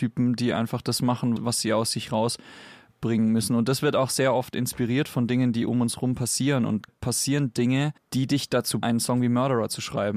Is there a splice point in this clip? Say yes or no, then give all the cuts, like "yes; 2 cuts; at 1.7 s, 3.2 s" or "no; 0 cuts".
yes; 4 cuts; at 1.4 s, 6.9 s, 8.0 s, 8.8 s